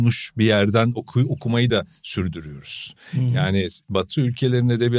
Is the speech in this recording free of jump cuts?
yes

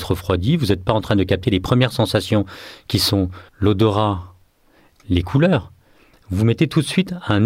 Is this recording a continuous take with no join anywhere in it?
no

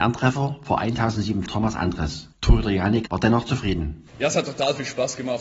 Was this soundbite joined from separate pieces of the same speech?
yes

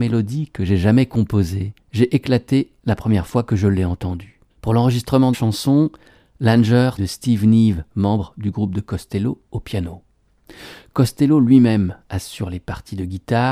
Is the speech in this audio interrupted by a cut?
yes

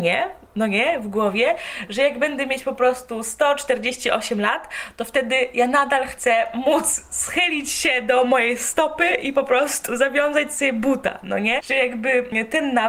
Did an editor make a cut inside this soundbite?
no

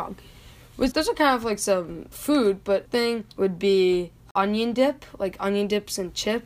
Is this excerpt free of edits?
no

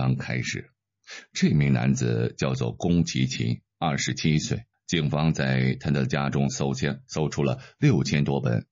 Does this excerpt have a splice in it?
yes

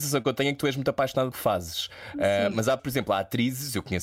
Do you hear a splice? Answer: yes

